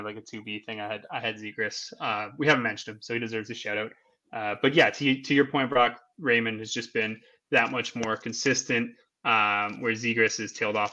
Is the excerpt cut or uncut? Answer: uncut